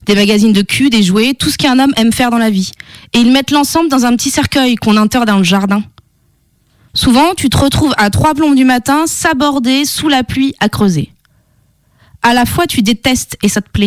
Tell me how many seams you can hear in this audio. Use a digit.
0